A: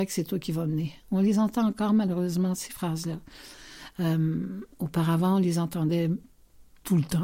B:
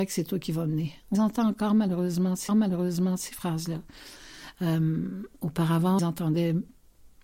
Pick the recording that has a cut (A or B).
B